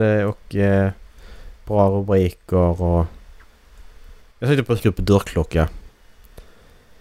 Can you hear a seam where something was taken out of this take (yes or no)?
yes